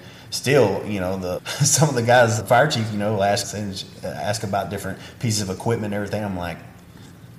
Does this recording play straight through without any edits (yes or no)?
no